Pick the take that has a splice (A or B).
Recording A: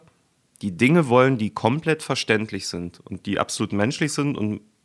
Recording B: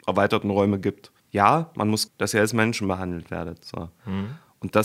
B